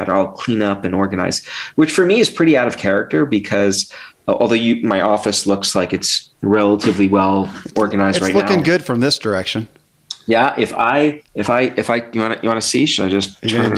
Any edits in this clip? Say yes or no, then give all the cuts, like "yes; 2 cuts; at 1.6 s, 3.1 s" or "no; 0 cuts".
yes; 1 cut; at 11.3 s